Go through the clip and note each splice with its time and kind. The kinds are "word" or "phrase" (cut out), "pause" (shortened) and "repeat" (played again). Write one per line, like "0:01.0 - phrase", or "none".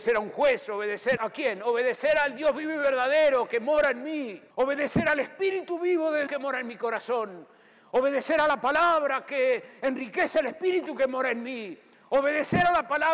0:01.2 - word
0:04.5 - pause
0:06.3 - word